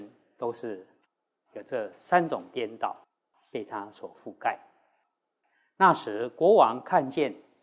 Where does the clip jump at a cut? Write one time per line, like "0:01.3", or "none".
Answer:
none